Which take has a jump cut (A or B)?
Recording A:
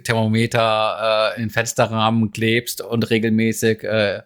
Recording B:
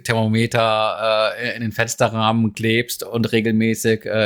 A